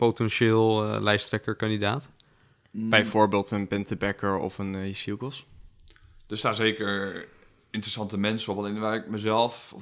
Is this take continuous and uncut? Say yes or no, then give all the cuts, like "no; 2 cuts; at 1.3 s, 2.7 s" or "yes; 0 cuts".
yes; 0 cuts